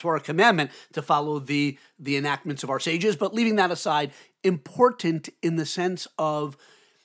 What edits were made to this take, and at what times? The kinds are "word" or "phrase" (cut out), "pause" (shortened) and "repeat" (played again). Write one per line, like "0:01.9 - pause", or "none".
none